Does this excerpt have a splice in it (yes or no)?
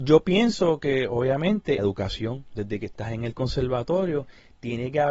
yes